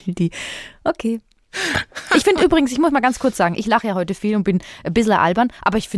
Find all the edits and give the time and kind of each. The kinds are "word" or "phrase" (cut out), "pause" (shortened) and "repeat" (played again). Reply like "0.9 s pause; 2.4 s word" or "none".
none